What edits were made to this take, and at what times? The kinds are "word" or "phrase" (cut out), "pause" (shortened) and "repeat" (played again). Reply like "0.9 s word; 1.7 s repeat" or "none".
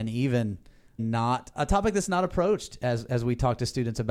1.0 s phrase; 1.5 s word